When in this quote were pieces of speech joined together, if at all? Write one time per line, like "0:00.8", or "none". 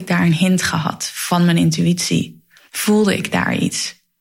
none